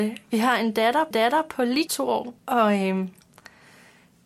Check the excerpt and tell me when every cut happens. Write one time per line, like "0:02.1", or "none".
0:01.1
0:01.9
0:02.4